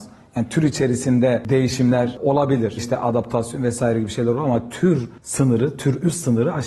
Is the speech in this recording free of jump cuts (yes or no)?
no